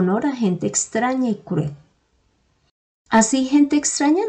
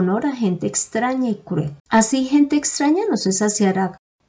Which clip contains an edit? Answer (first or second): second